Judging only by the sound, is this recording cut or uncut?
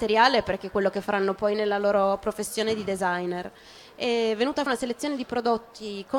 cut